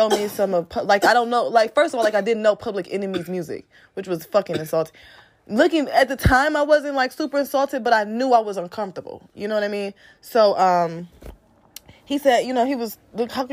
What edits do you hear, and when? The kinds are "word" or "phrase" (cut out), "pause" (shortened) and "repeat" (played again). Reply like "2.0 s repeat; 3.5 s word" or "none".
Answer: none